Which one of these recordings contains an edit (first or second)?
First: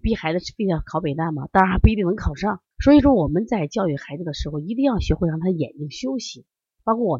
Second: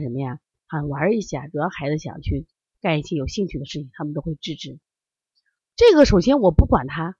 first